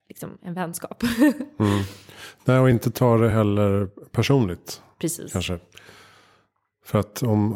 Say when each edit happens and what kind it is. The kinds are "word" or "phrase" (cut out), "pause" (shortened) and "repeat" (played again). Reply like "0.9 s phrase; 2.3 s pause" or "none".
none